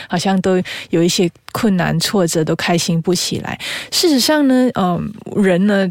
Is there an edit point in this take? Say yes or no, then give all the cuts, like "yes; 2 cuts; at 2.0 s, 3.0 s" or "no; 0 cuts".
no; 0 cuts